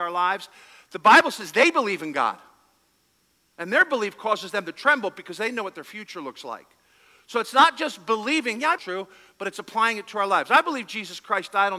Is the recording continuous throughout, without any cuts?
no; 1 cut; at 8.8 s

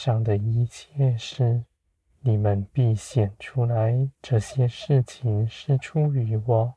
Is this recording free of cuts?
no; 2 cuts; at 1.8 s, 4.2 s

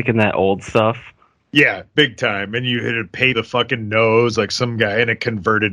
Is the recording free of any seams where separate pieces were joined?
no; 1 cut; at 3.3 s

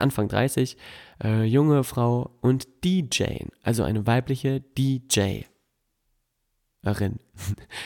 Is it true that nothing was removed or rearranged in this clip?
yes; 0 cuts

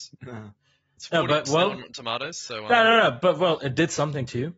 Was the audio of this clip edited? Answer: no; 0 cuts

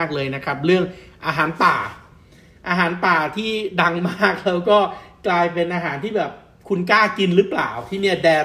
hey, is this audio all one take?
yes; 0 cuts

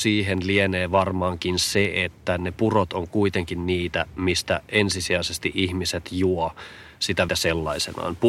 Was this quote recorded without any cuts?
no; 1 cut; at 7.3 s

